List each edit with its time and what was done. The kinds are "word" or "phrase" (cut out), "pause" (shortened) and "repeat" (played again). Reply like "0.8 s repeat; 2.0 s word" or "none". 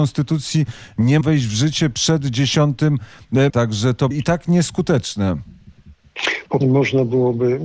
1.2 s word; 3.5 s word; 4.1 s word; 6.6 s word